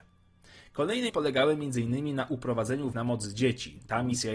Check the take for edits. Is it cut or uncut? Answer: cut